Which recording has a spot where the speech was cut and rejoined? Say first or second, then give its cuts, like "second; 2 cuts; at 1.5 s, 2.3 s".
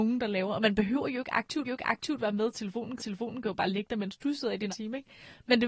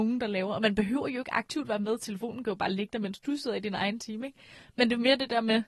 first; 3 cuts; at 1.6 s, 3.0 s, 4.7 s